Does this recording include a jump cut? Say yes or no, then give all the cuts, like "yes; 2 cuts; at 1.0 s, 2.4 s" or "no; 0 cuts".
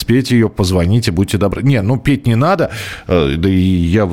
no; 0 cuts